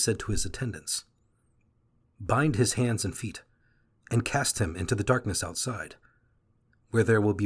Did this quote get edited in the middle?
no; 0 cuts

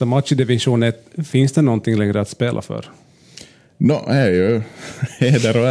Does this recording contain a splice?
no; 0 cuts

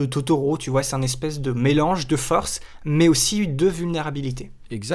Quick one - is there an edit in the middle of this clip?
no; 0 cuts

